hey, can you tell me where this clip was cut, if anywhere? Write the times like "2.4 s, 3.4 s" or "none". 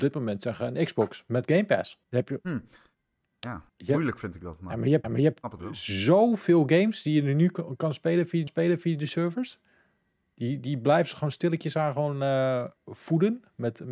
2.0 s, 3.7 s, 5.0 s, 8.5 s, 12.8 s